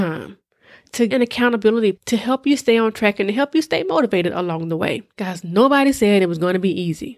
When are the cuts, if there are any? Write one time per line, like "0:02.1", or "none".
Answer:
0:01.1
0:01.9
0:05.1